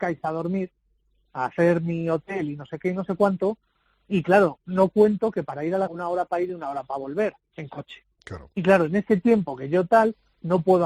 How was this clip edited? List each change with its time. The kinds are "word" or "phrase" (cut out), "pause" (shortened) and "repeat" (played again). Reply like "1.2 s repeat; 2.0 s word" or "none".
5.9 s phrase; 8.1 s pause